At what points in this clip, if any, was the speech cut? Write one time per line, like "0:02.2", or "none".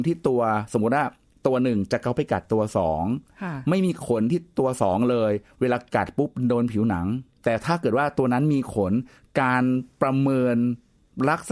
none